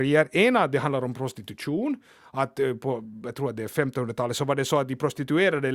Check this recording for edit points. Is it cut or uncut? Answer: uncut